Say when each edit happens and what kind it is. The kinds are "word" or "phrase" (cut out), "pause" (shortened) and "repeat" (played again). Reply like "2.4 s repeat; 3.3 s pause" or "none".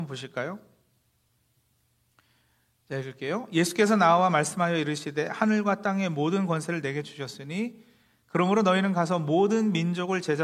none